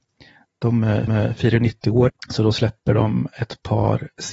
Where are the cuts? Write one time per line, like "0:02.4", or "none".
0:01.1
0:02.1

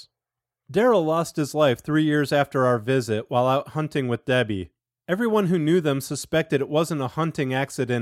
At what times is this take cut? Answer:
none

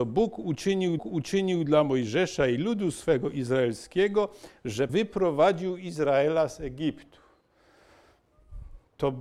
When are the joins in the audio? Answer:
0:01.0
0:04.9

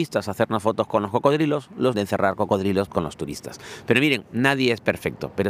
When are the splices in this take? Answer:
0:01.9
0:02.9

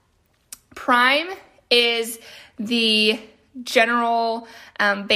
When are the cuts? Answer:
none

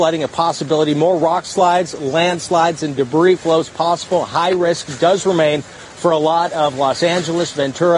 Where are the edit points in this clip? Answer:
none

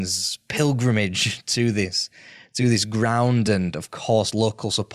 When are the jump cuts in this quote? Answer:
none

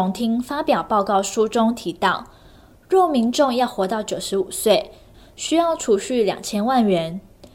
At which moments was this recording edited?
none

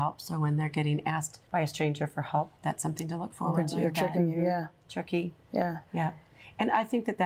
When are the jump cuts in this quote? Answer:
0:01.5
0:02.6
0:05.9

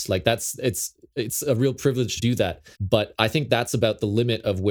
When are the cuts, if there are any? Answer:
0:02.2
0:02.7

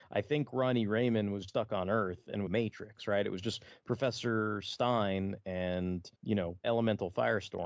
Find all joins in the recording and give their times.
0:01.5
0:02.5
0:06.1
0:06.6

